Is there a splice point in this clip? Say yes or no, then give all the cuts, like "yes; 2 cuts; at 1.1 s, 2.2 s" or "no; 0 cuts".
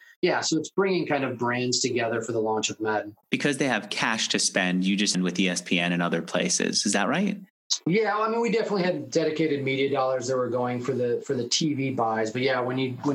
yes; 1 cut; at 5.1 s